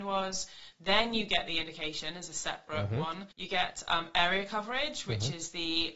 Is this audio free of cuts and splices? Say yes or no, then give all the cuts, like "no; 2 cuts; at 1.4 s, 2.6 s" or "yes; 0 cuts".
no; 1 cut; at 3.3 s